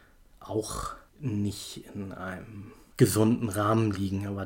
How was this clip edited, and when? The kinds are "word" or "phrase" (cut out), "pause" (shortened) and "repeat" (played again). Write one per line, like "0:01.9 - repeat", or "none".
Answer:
0:01.1 - pause